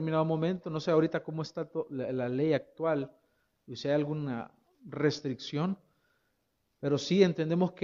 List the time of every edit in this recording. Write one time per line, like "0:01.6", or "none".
none